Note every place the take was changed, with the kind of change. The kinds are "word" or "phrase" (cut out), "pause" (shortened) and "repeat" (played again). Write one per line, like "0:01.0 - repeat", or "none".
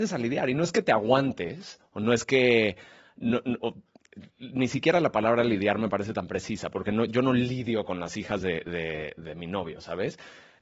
none